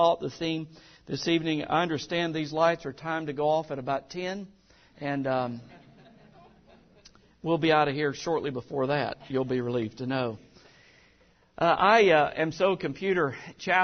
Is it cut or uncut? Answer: uncut